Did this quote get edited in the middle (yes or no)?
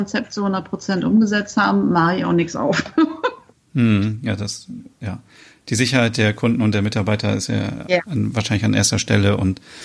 no